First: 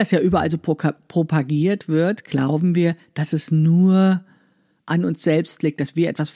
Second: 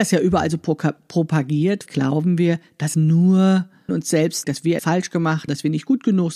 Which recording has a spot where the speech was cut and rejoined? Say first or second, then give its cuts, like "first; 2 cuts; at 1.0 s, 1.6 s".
second; 6 cuts; at 1.9 s, 2.9 s, 3.9 s, 4.4 s, 4.8 s, 5.5 s